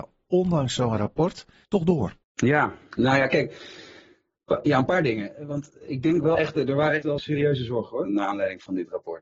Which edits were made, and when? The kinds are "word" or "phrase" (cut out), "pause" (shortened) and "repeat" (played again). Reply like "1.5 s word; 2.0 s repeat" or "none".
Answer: 1.6 s phrase; 2.2 s pause; 7.0 s word